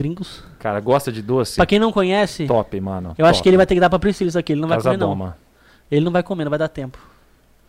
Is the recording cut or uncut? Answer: uncut